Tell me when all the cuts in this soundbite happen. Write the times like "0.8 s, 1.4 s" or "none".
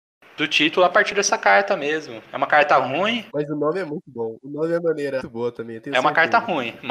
3.3 s, 5.2 s